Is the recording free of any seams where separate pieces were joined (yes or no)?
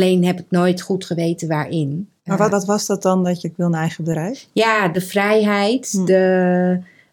no